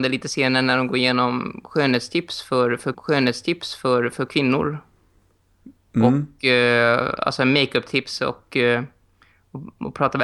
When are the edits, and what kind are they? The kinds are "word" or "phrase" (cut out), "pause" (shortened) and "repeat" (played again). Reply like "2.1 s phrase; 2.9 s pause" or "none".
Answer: 2.9 s repeat; 8.5 s word